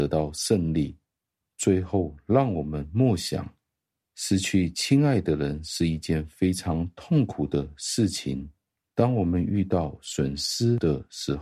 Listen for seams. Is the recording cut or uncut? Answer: uncut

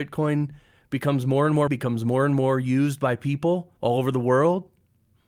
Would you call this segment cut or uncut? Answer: cut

